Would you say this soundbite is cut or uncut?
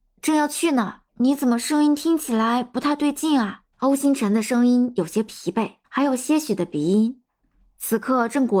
cut